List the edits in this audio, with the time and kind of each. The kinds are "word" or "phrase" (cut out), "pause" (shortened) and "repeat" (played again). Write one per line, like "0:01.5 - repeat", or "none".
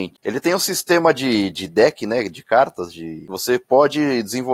none

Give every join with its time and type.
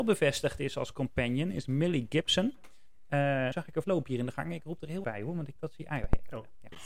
0:03.5 - word
0:03.8 - phrase
0:05.0 - word
0:05.6 - word

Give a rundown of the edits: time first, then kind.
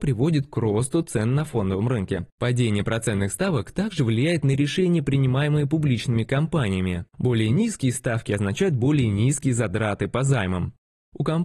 0:02.3 - pause
0:07.1 - pause

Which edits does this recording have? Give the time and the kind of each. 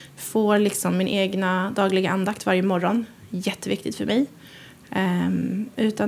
none

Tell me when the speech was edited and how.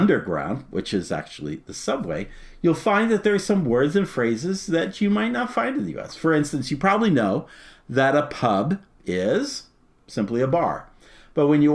none

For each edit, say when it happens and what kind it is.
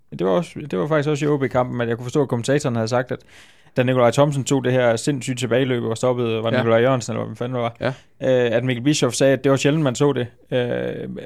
none

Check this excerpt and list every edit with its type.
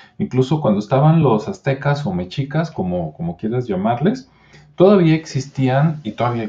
none

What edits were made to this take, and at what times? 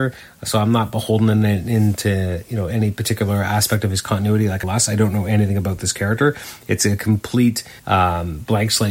0:04.6 - phrase
0:07.8 - pause

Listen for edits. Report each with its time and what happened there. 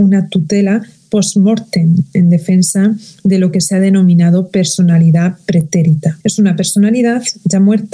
0:06.2 - pause

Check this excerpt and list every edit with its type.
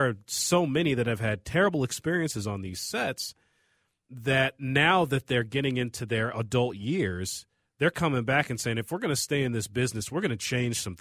none

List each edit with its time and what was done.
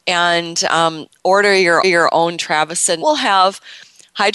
0:01.8 - repeat
0:03.0 - word

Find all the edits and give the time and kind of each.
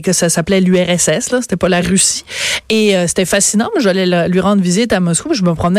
none

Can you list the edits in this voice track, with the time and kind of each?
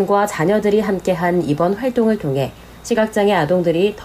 none

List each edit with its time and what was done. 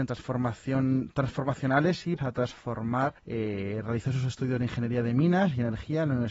0:02.2 - word
0:03.2 - pause

